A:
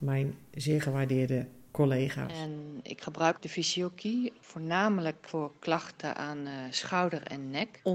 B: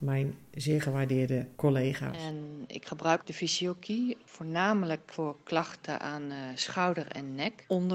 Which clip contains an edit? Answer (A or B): B